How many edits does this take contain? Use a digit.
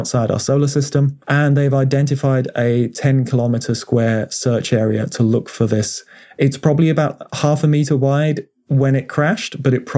1